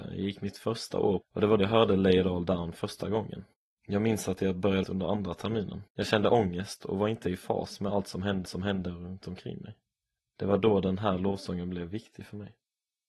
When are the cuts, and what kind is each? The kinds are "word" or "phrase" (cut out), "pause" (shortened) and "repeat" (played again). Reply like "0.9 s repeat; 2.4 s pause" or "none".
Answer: 1.2 s phrase; 1.6 s word; 2.8 s word; 3.5 s pause; 4.8 s phrase; 5.9 s pause; 8.4 s repeat; 10.2 s pause